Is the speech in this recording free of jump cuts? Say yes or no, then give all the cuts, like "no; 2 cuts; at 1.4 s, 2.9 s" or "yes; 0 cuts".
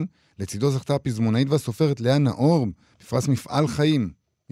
yes; 0 cuts